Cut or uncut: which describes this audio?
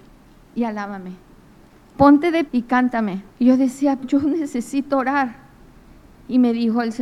cut